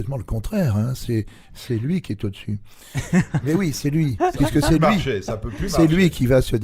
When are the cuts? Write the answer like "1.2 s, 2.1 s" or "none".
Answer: none